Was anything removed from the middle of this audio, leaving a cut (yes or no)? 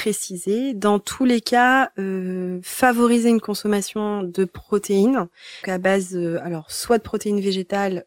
yes